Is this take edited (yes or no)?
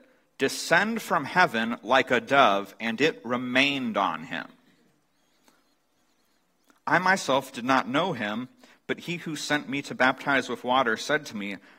no